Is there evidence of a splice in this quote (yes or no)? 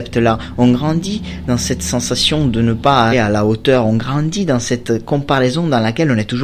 yes